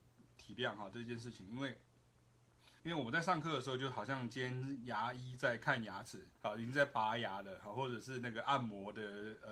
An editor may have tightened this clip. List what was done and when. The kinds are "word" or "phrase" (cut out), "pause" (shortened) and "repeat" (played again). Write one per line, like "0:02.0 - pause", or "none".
0:02.8 - pause
0:06.4 - pause